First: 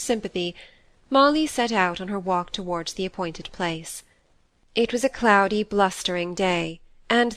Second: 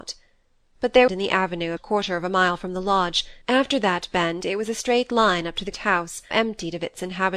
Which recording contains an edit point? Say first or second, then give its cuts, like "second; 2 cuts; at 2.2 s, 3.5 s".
second; 5 cuts; at 1.1 s, 1.8 s, 3.4 s, 5.7 s, 6.3 s